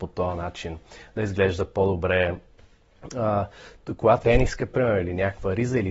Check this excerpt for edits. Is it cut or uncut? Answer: cut